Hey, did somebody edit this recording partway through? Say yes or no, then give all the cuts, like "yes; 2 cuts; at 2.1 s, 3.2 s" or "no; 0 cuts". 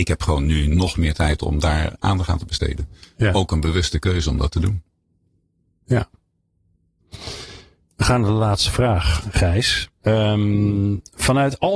no; 0 cuts